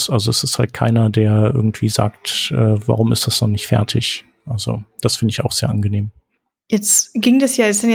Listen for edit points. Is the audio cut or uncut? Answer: cut